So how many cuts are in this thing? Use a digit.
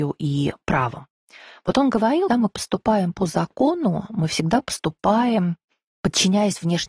1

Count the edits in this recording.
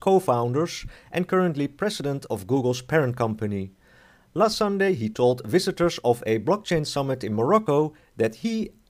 0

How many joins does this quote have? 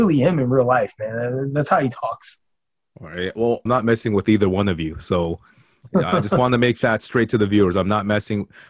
1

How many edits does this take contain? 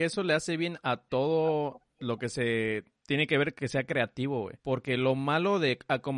1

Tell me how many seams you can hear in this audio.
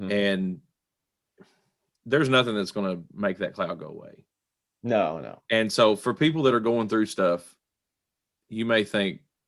0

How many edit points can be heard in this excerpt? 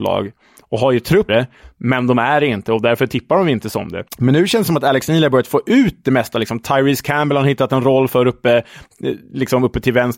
2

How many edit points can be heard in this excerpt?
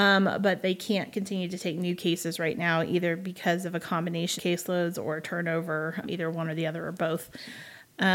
2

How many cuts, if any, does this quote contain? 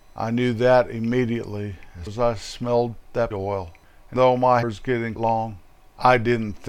5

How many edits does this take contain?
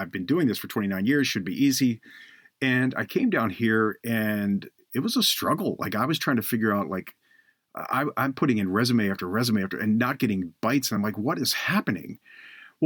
0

